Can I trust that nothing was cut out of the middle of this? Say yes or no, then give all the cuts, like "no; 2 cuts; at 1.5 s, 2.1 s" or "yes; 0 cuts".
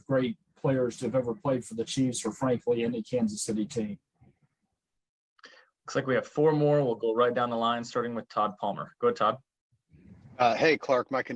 yes; 0 cuts